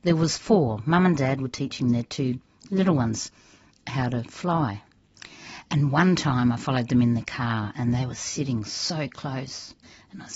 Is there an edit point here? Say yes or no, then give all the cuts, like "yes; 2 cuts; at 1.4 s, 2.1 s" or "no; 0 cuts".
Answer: no; 0 cuts